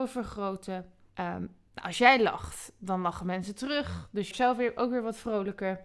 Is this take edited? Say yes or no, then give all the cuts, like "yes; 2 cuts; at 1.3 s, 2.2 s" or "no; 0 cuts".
yes; 2 cuts; at 1.1 s, 4.3 s